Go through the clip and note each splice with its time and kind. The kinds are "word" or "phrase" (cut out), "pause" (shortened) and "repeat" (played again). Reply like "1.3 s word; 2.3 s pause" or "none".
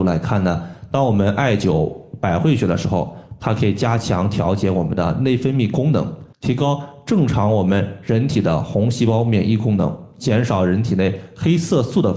6.3 s pause